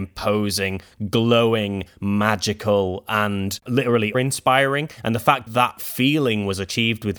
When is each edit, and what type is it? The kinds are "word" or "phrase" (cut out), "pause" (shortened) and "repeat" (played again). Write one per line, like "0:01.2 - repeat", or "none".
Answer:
0:04.1 - word
0:05.5 - word